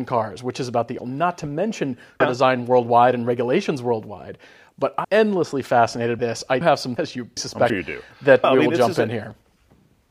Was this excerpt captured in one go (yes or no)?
no